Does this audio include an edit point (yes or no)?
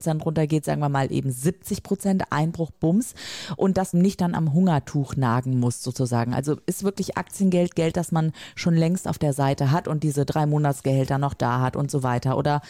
yes